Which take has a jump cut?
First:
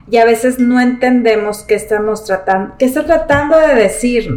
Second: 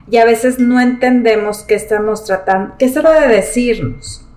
second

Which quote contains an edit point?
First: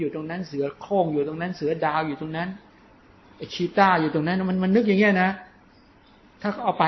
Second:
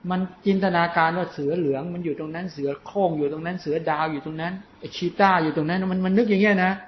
second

